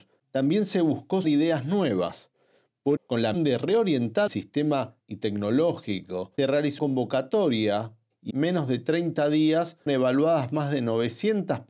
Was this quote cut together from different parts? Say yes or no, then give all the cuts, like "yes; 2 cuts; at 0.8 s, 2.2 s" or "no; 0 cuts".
yes; 9 cuts; at 1.2 s, 3.0 s, 3.3 s, 4.3 s, 5.0 s, 6.4 s, 6.8 s, 8.3 s, 9.9 s